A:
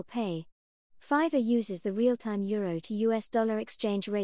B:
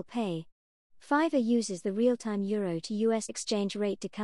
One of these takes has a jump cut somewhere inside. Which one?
B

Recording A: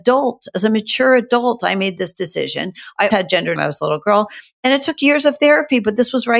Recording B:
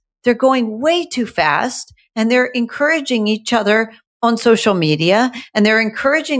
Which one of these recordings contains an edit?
A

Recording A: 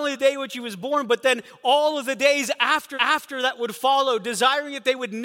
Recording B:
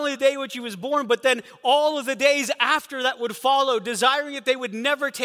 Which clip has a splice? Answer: A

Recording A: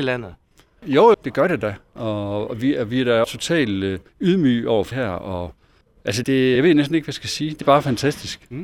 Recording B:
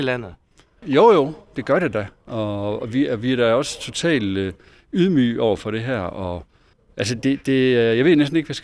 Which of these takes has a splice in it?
A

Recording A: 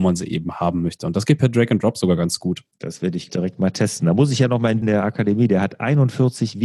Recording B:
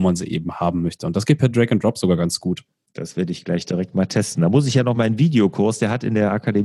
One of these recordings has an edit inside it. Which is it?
A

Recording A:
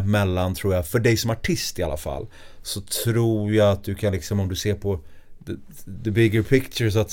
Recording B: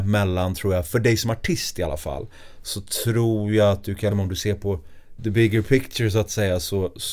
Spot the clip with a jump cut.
B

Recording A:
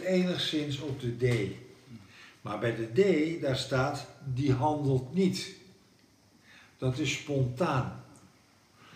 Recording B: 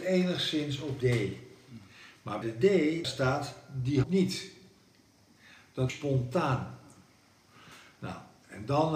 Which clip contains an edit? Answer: B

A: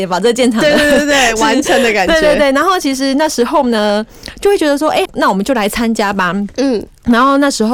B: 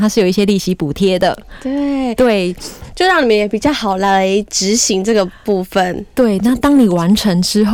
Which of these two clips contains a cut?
A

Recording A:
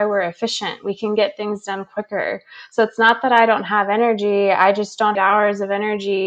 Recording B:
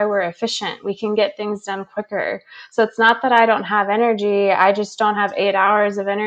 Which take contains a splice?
A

